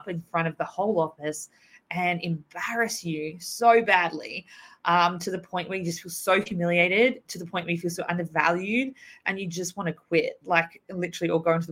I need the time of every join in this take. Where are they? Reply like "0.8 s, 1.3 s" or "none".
none